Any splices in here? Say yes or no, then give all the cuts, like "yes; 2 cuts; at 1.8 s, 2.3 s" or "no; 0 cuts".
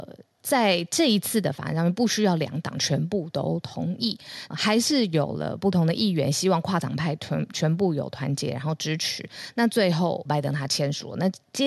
yes; 2 cuts; at 4.5 s, 10.3 s